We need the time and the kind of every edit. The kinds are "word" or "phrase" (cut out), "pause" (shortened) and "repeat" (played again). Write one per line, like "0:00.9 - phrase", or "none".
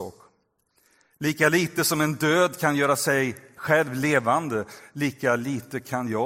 none